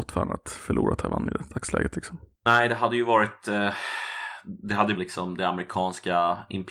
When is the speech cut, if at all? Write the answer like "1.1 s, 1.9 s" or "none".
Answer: 5.0 s